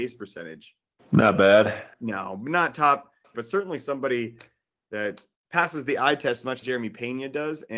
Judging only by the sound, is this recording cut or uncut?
cut